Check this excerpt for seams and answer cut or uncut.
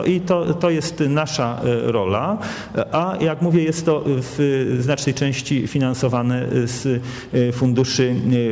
uncut